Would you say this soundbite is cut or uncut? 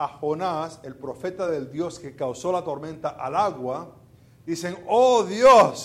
uncut